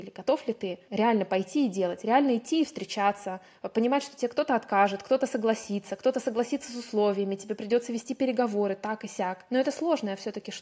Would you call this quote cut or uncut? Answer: uncut